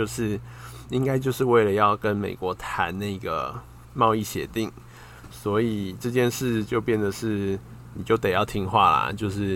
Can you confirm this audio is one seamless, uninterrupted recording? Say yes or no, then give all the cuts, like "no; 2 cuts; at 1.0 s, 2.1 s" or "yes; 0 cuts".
no; 1 cut; at 3.8 s